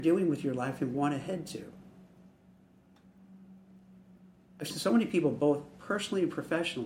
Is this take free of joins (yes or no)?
no